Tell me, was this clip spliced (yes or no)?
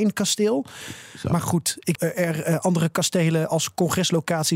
yes